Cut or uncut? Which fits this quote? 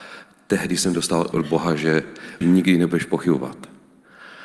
cut